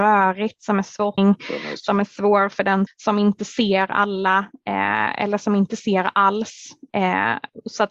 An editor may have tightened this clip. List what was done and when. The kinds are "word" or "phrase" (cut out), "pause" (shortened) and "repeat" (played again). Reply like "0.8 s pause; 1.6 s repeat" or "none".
1.2 s phrase; 2.9 s word